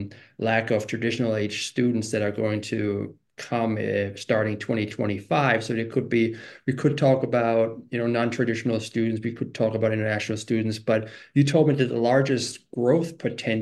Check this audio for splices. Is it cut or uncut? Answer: uncut